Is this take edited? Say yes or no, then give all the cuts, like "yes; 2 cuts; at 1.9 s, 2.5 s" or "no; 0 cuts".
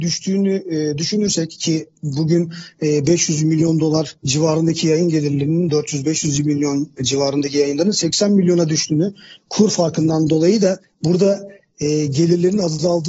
yes; 1 cut; at 4.2 s